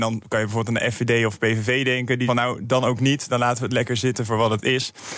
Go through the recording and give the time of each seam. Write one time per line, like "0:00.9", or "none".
0:02.3